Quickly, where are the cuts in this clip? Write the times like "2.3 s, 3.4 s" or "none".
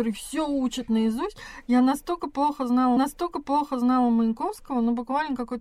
3.0 s